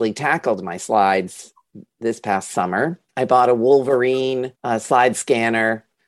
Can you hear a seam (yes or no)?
yes